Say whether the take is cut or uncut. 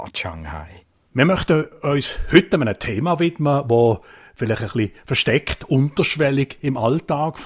uncut